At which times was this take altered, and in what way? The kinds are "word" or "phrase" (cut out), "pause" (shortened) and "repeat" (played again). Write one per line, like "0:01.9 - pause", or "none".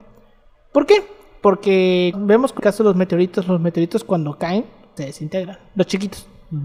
0:02.1 - word
0:02.6 - word
0:05.0 - word

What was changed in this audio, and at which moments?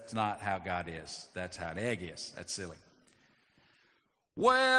none

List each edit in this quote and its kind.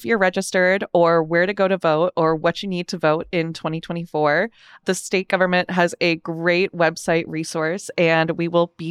none

